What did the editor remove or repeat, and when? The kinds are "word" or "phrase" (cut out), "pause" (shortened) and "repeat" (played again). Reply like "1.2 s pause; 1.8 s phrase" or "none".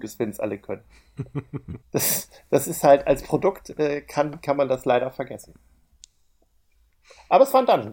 1.8 s pause